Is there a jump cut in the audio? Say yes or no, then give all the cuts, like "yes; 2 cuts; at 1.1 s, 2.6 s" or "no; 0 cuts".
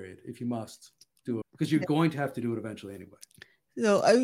yes; 1 cut; at 1.4 s